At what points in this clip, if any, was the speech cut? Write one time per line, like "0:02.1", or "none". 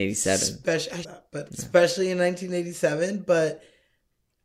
0:01.0
0:01.5